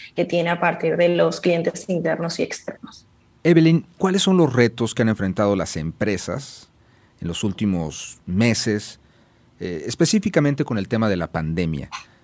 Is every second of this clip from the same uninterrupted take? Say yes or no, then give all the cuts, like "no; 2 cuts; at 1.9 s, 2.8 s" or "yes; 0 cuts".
yes; 0 cuts